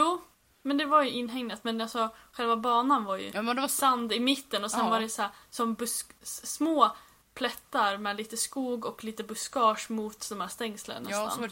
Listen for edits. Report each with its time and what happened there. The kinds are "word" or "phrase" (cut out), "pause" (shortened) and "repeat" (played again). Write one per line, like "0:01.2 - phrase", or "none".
none